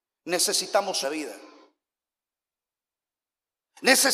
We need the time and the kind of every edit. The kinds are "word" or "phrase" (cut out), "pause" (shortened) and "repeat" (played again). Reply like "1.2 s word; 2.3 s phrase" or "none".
1.0 s phrase